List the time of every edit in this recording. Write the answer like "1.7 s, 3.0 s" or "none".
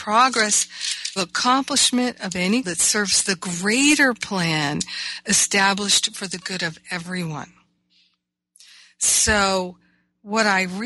1.2 s, 2.6 s